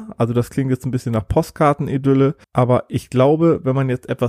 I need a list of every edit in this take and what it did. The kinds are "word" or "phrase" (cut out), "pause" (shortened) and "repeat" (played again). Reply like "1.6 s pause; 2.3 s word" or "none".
2.4 s pause